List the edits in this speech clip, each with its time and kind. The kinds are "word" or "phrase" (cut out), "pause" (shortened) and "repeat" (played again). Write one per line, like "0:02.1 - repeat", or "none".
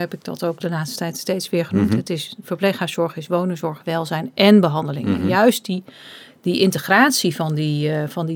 none